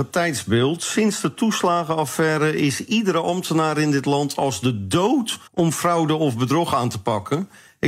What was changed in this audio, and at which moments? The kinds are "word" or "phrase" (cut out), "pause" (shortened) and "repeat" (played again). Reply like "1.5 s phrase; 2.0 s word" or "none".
5.5 s pause